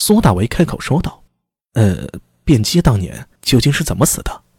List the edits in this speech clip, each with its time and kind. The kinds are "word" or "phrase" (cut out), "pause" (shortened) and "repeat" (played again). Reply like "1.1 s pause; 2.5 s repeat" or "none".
1.3 s pause; 3.4 s pause